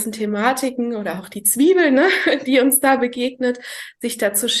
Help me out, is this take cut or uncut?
uncut